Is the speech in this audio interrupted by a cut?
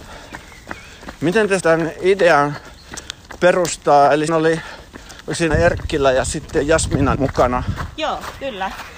yes; 4 cuts; at 1.6 s, 4.3 s, 5.5 s, 7.1 s

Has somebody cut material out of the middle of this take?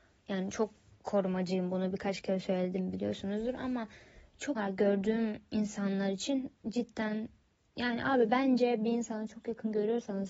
yes; 2 cuts; at 4.6 s, 6.6 s

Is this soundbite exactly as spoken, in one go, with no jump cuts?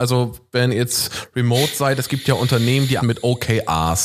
no; 1 cut; at 3.0 s

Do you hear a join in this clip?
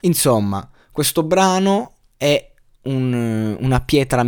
no; 0 cuts

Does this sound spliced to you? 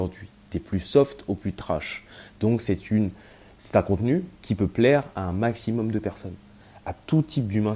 no; 0 cuts

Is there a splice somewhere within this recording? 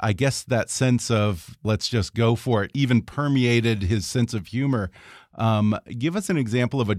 no; 0 cuts

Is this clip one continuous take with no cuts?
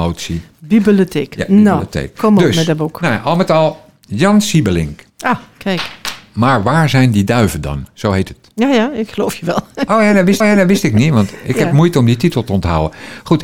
no; 2 cuts; at 5.1 s, 10.4 s

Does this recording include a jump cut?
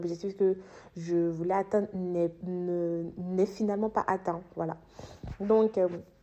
no; 0 cuts

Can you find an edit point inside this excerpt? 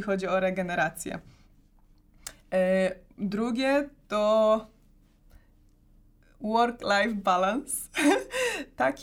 no; 0 cuts

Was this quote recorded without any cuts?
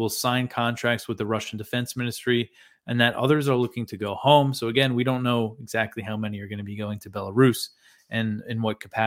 yes; 0 cuts

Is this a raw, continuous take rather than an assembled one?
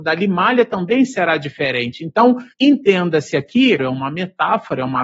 no; 2 cuts; at 2.5 s, 3.8 s

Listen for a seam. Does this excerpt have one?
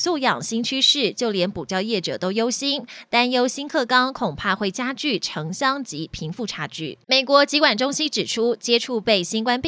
yes; 1 cut; at 7.0 s

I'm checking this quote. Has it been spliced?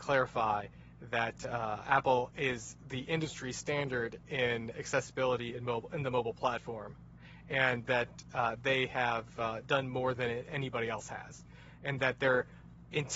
no; 0 cuts

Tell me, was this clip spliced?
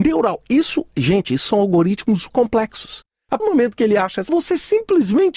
yes; 3 cuts; at 2.3 s, 3.4 s, 4.3 s

